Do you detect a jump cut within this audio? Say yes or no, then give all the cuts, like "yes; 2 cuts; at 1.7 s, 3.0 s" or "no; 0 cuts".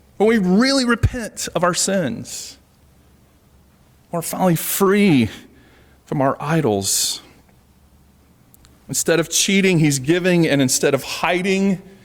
no; 0 cuts